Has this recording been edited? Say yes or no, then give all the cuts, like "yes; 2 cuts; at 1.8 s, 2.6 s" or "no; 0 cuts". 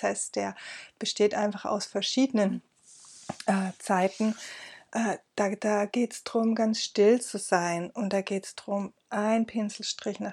no; 0 cuts